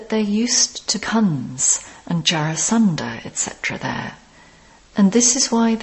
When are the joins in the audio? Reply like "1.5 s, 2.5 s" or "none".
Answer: 1.0 s